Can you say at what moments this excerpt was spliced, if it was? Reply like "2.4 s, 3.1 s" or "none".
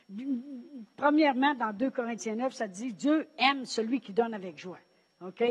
none